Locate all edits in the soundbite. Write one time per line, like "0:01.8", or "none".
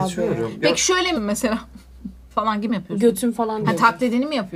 0:01.2
0:02.7